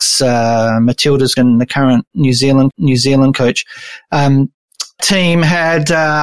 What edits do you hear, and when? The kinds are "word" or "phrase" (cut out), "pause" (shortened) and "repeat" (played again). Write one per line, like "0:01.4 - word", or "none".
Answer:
0:01.4 - word
0:02.7 - repeat
0:05.0 - word